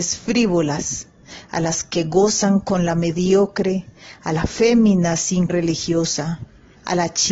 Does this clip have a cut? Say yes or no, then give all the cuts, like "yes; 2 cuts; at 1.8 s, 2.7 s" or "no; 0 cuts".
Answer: yes; 1 cut; at 5.5 s